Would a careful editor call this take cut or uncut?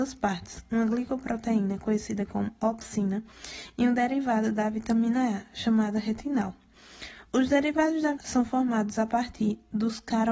cut